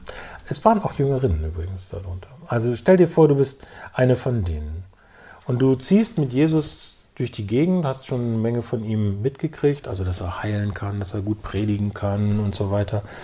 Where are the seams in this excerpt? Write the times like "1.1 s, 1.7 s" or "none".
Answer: none

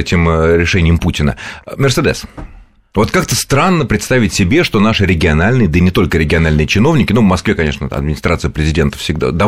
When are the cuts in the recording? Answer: none

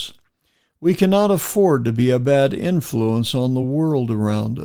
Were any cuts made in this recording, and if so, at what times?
none

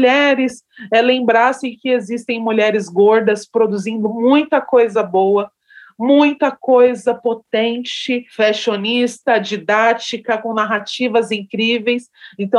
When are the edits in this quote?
none

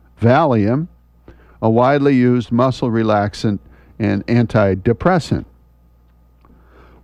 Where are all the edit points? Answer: none

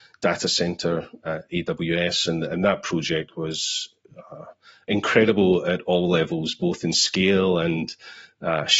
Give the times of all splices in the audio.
none

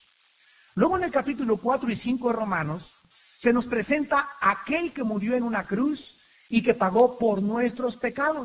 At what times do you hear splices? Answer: none

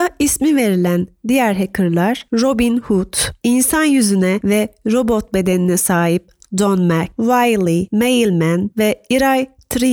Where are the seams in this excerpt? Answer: none

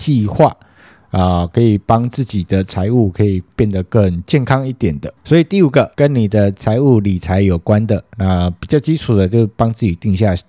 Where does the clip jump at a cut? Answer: 5.9 s

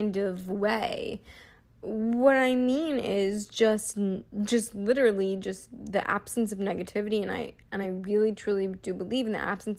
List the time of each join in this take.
none

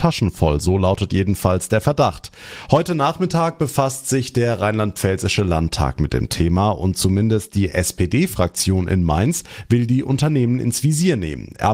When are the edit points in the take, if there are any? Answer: none

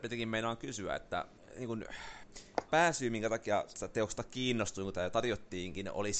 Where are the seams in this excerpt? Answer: 2.7 s

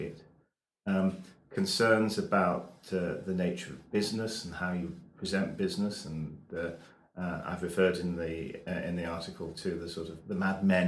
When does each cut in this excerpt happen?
none

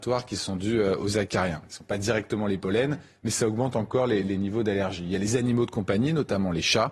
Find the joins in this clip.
none

